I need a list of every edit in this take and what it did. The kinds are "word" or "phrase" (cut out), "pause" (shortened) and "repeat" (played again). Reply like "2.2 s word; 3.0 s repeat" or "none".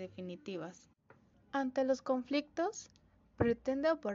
1.3 s pause